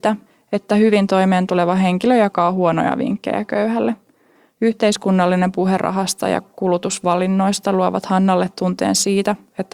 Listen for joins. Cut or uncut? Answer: uncut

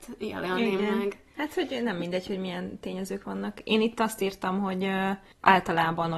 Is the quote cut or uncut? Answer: uncut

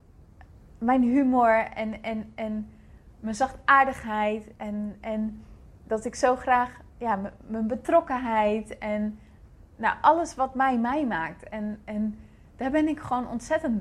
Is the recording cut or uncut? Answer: uncut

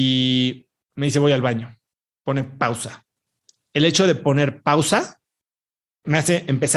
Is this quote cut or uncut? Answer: uncut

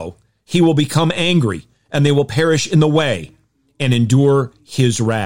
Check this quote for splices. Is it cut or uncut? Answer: uncut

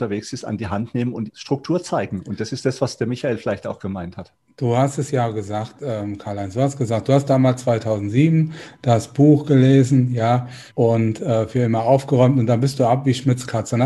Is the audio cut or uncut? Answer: cut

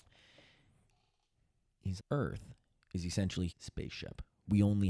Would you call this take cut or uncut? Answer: cut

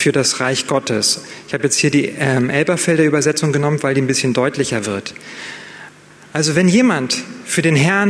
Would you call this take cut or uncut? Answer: uncut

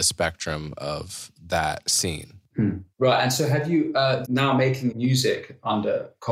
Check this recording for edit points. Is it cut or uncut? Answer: cut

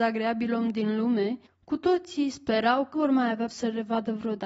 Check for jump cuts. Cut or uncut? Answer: cut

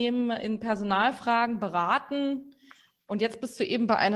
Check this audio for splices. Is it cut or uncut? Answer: uncut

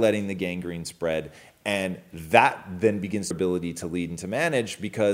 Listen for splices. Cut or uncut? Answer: cut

